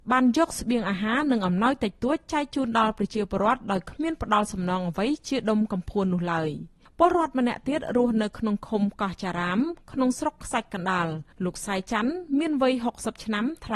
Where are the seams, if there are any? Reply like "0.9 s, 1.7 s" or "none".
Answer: 11.3 s